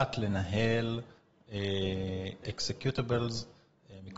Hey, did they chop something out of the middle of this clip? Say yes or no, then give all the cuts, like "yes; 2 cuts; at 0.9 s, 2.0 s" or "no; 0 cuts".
yes; 1 cut; at 2.4 s